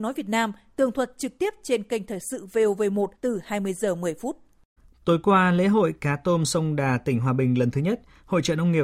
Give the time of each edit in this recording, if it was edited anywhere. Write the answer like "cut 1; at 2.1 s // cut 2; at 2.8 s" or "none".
cut 1; at 3.1 s // cut 2; at 4.8 s